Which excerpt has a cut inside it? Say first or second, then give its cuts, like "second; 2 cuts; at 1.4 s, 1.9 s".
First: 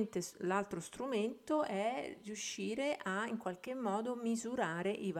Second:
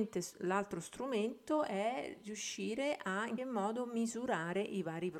second; 1 cut; at 3.4 s